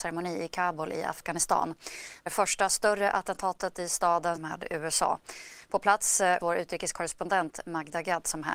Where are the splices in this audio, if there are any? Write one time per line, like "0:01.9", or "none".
0:02.3
0:04.4
0:06.4